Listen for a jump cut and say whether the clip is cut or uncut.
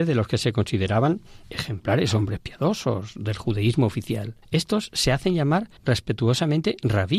cut